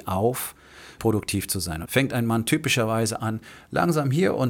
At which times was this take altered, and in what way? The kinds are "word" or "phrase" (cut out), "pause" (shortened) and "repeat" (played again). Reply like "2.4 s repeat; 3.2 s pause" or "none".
1.0 s word; 1.8 s word